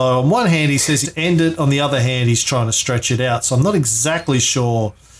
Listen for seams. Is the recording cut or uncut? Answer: cut